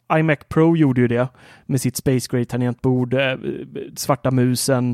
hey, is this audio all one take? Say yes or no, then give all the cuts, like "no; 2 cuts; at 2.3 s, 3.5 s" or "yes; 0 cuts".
yes; 0 cuts